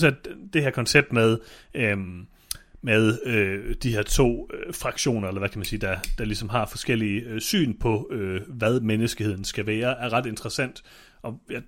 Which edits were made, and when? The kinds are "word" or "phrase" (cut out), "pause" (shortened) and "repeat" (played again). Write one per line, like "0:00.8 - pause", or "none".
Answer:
none